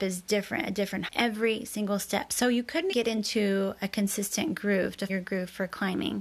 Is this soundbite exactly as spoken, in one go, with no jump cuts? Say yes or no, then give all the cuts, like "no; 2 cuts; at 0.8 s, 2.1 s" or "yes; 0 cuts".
no; 3 cuts; at 1.1 s, 2.9 s, 5.1 s